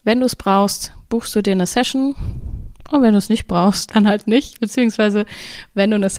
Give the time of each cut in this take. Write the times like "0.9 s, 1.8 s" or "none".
none